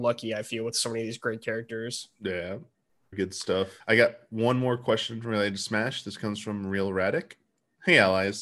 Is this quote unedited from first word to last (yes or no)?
no